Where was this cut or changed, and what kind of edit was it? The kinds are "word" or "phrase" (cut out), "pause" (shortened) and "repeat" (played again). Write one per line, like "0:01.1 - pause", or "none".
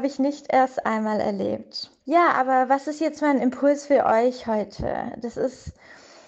0:02.0 - pause

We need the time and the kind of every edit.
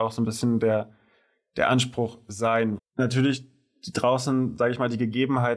0:02.8 - word

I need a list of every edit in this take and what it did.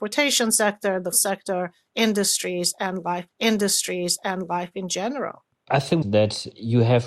0:01.1 - word
0:03.3 - repeat
0:06.0 - phrase

